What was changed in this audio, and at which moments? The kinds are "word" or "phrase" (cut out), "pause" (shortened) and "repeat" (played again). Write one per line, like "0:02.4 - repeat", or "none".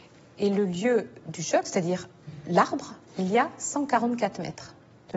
0:03.0 - pause

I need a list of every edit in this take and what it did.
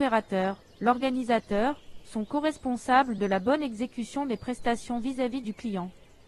none

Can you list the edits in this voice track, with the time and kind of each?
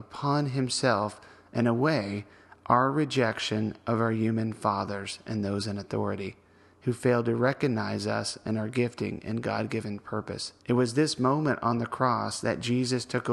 0:10.6 - pause

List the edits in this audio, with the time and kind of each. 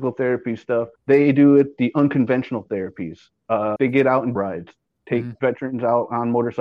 0:00.9 - pause
0:03.8 - word
0:04.3 - phrase

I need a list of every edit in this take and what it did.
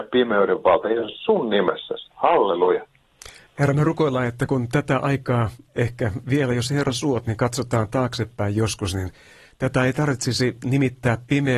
none

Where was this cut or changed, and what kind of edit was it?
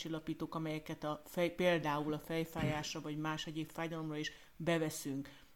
none

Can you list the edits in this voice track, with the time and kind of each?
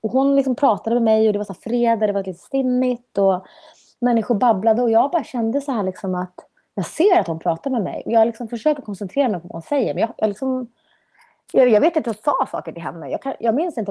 none

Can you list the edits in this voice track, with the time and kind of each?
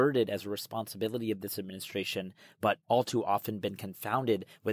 0:02.8 - pause

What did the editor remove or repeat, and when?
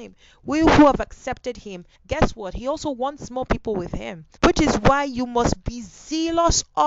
0:01.9 - pause
0:04.4 - pause

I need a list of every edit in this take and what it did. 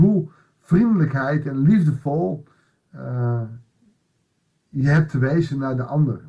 none

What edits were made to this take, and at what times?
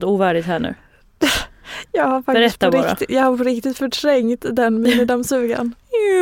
none

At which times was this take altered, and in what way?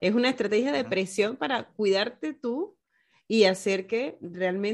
none

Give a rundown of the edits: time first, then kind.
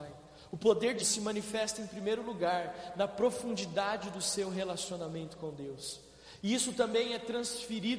0:01.0 - word

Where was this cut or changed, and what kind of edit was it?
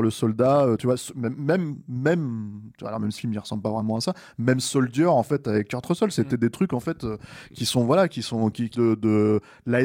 0:03.2 - word
0:08.7 - word

